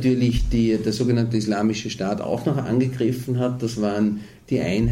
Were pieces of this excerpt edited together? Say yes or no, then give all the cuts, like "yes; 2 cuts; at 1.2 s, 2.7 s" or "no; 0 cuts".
no; 0 cuts